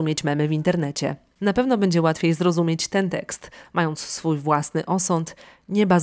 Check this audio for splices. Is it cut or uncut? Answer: uncut